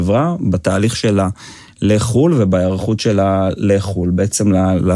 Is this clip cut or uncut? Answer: uncut